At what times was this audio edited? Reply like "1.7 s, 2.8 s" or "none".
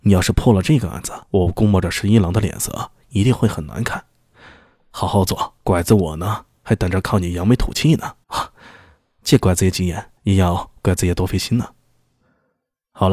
1.2 s, 5.6 s, 8.2 s, 10.2 s